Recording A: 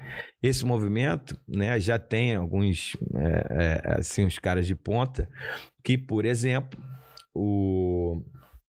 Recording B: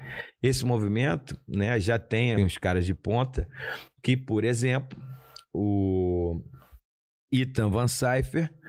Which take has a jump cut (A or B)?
B